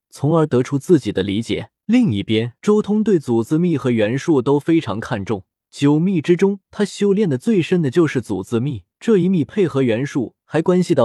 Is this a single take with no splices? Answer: no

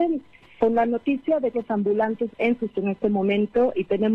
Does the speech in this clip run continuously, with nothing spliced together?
no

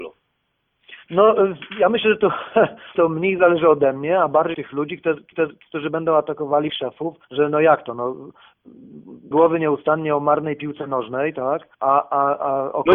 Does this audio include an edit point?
yes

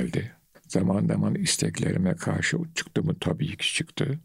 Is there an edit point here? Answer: no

